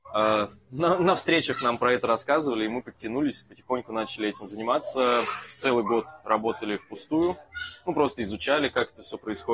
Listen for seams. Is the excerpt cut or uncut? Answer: uncut